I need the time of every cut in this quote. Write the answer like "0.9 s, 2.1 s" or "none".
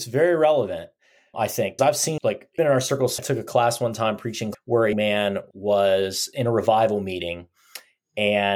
1.3 s, 1.8 s, 2.2 s, 2.6 s, 3.2 s, 4.5 s, 4.9 s, 5.5 s